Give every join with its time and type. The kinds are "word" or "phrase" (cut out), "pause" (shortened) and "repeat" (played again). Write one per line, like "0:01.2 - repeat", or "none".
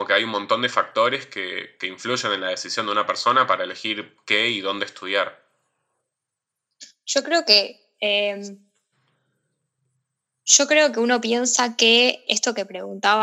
0:12.3 - word